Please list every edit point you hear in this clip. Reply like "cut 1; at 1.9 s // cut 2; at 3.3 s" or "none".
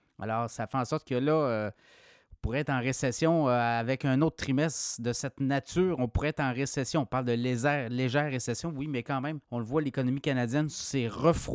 cut 1; at 9.4 s